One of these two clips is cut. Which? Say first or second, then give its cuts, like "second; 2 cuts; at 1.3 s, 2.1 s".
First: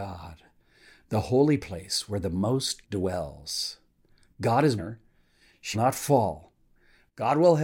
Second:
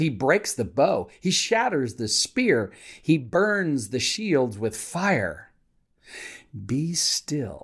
first; 3 cuts; at 2.8 s, 4.8 s, 5.7 s